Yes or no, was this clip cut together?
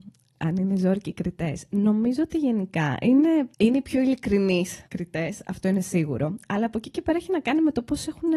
yes